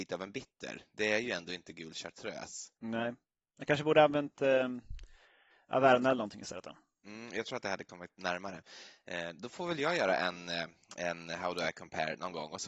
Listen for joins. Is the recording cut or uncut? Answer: uncut